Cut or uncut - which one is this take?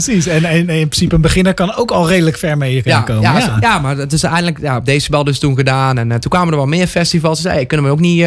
uncut